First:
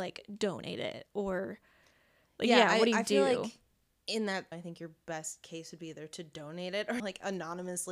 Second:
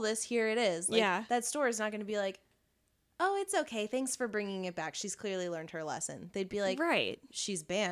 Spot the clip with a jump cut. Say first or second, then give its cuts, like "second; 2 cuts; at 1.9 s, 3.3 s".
first; 2 cuts; at 4.5 s, 7.0 s